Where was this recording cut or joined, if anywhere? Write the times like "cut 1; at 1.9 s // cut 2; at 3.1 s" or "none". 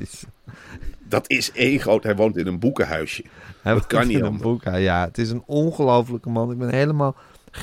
none

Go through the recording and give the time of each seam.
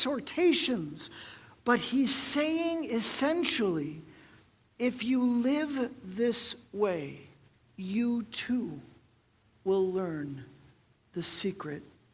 cut 1; at 7.5 s

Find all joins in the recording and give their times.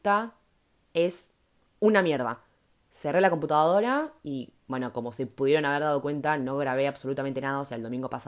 none

